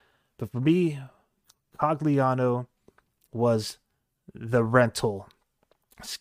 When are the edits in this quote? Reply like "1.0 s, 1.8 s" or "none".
none